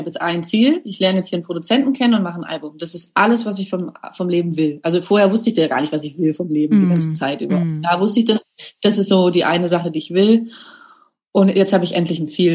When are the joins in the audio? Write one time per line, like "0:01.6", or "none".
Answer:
none